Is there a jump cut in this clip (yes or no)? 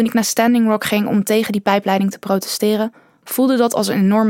no